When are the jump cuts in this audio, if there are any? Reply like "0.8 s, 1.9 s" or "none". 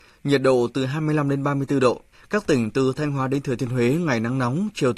2.1 s